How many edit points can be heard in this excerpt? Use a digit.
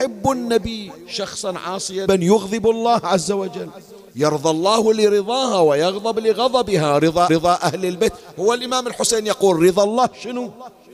3